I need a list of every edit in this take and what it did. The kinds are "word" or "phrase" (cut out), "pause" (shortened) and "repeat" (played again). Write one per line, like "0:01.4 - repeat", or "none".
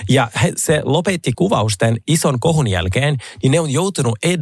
0:01.3 - word